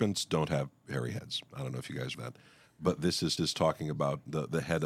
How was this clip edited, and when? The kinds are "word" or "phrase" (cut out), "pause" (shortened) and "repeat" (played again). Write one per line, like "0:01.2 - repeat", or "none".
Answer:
0:02.1 - phrase
0:03.4 - repeat